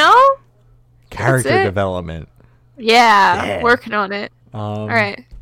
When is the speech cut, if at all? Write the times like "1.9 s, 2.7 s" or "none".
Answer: none